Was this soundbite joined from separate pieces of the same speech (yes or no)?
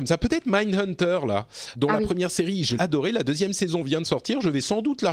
yes